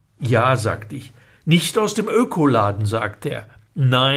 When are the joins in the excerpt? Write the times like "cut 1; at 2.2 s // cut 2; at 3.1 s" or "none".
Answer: none